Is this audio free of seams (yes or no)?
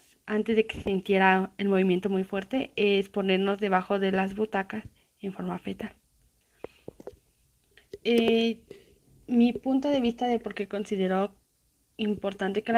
yes